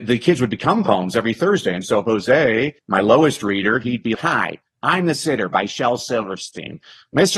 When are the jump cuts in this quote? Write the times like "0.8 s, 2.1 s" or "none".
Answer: 2.8 s, 4.1 s